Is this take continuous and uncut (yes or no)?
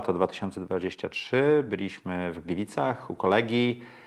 yes